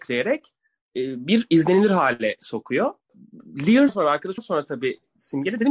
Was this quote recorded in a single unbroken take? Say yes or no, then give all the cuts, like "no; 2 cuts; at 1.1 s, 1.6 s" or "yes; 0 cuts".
no; 2 cuts; at 3.9 s, 4.4 s